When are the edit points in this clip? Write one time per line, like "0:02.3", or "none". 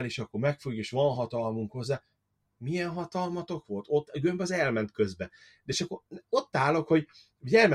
none